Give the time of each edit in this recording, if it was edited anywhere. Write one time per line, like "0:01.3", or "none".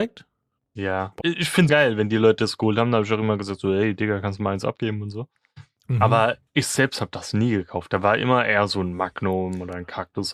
0:01.2
0:01.7
0:06.5